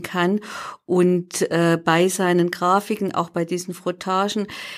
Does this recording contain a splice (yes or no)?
no